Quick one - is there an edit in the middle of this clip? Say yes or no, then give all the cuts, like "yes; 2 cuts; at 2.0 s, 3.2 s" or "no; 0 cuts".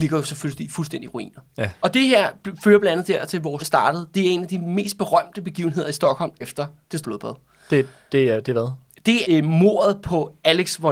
yes; 4 cuts; at 3.6 s, 6.4 s, 7.0 s, 9.2 s